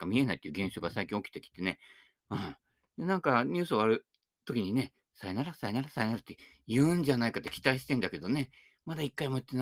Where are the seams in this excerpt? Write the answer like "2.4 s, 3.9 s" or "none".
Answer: none